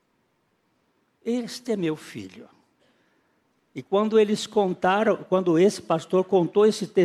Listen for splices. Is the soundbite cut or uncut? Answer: uncut